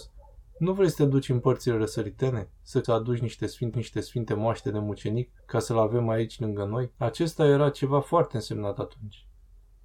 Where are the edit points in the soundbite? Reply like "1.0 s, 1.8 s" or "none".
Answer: 2.8 s, 3.7 s, 5.4 s, 6.9 s